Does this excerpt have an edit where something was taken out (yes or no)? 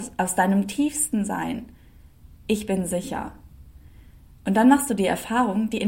no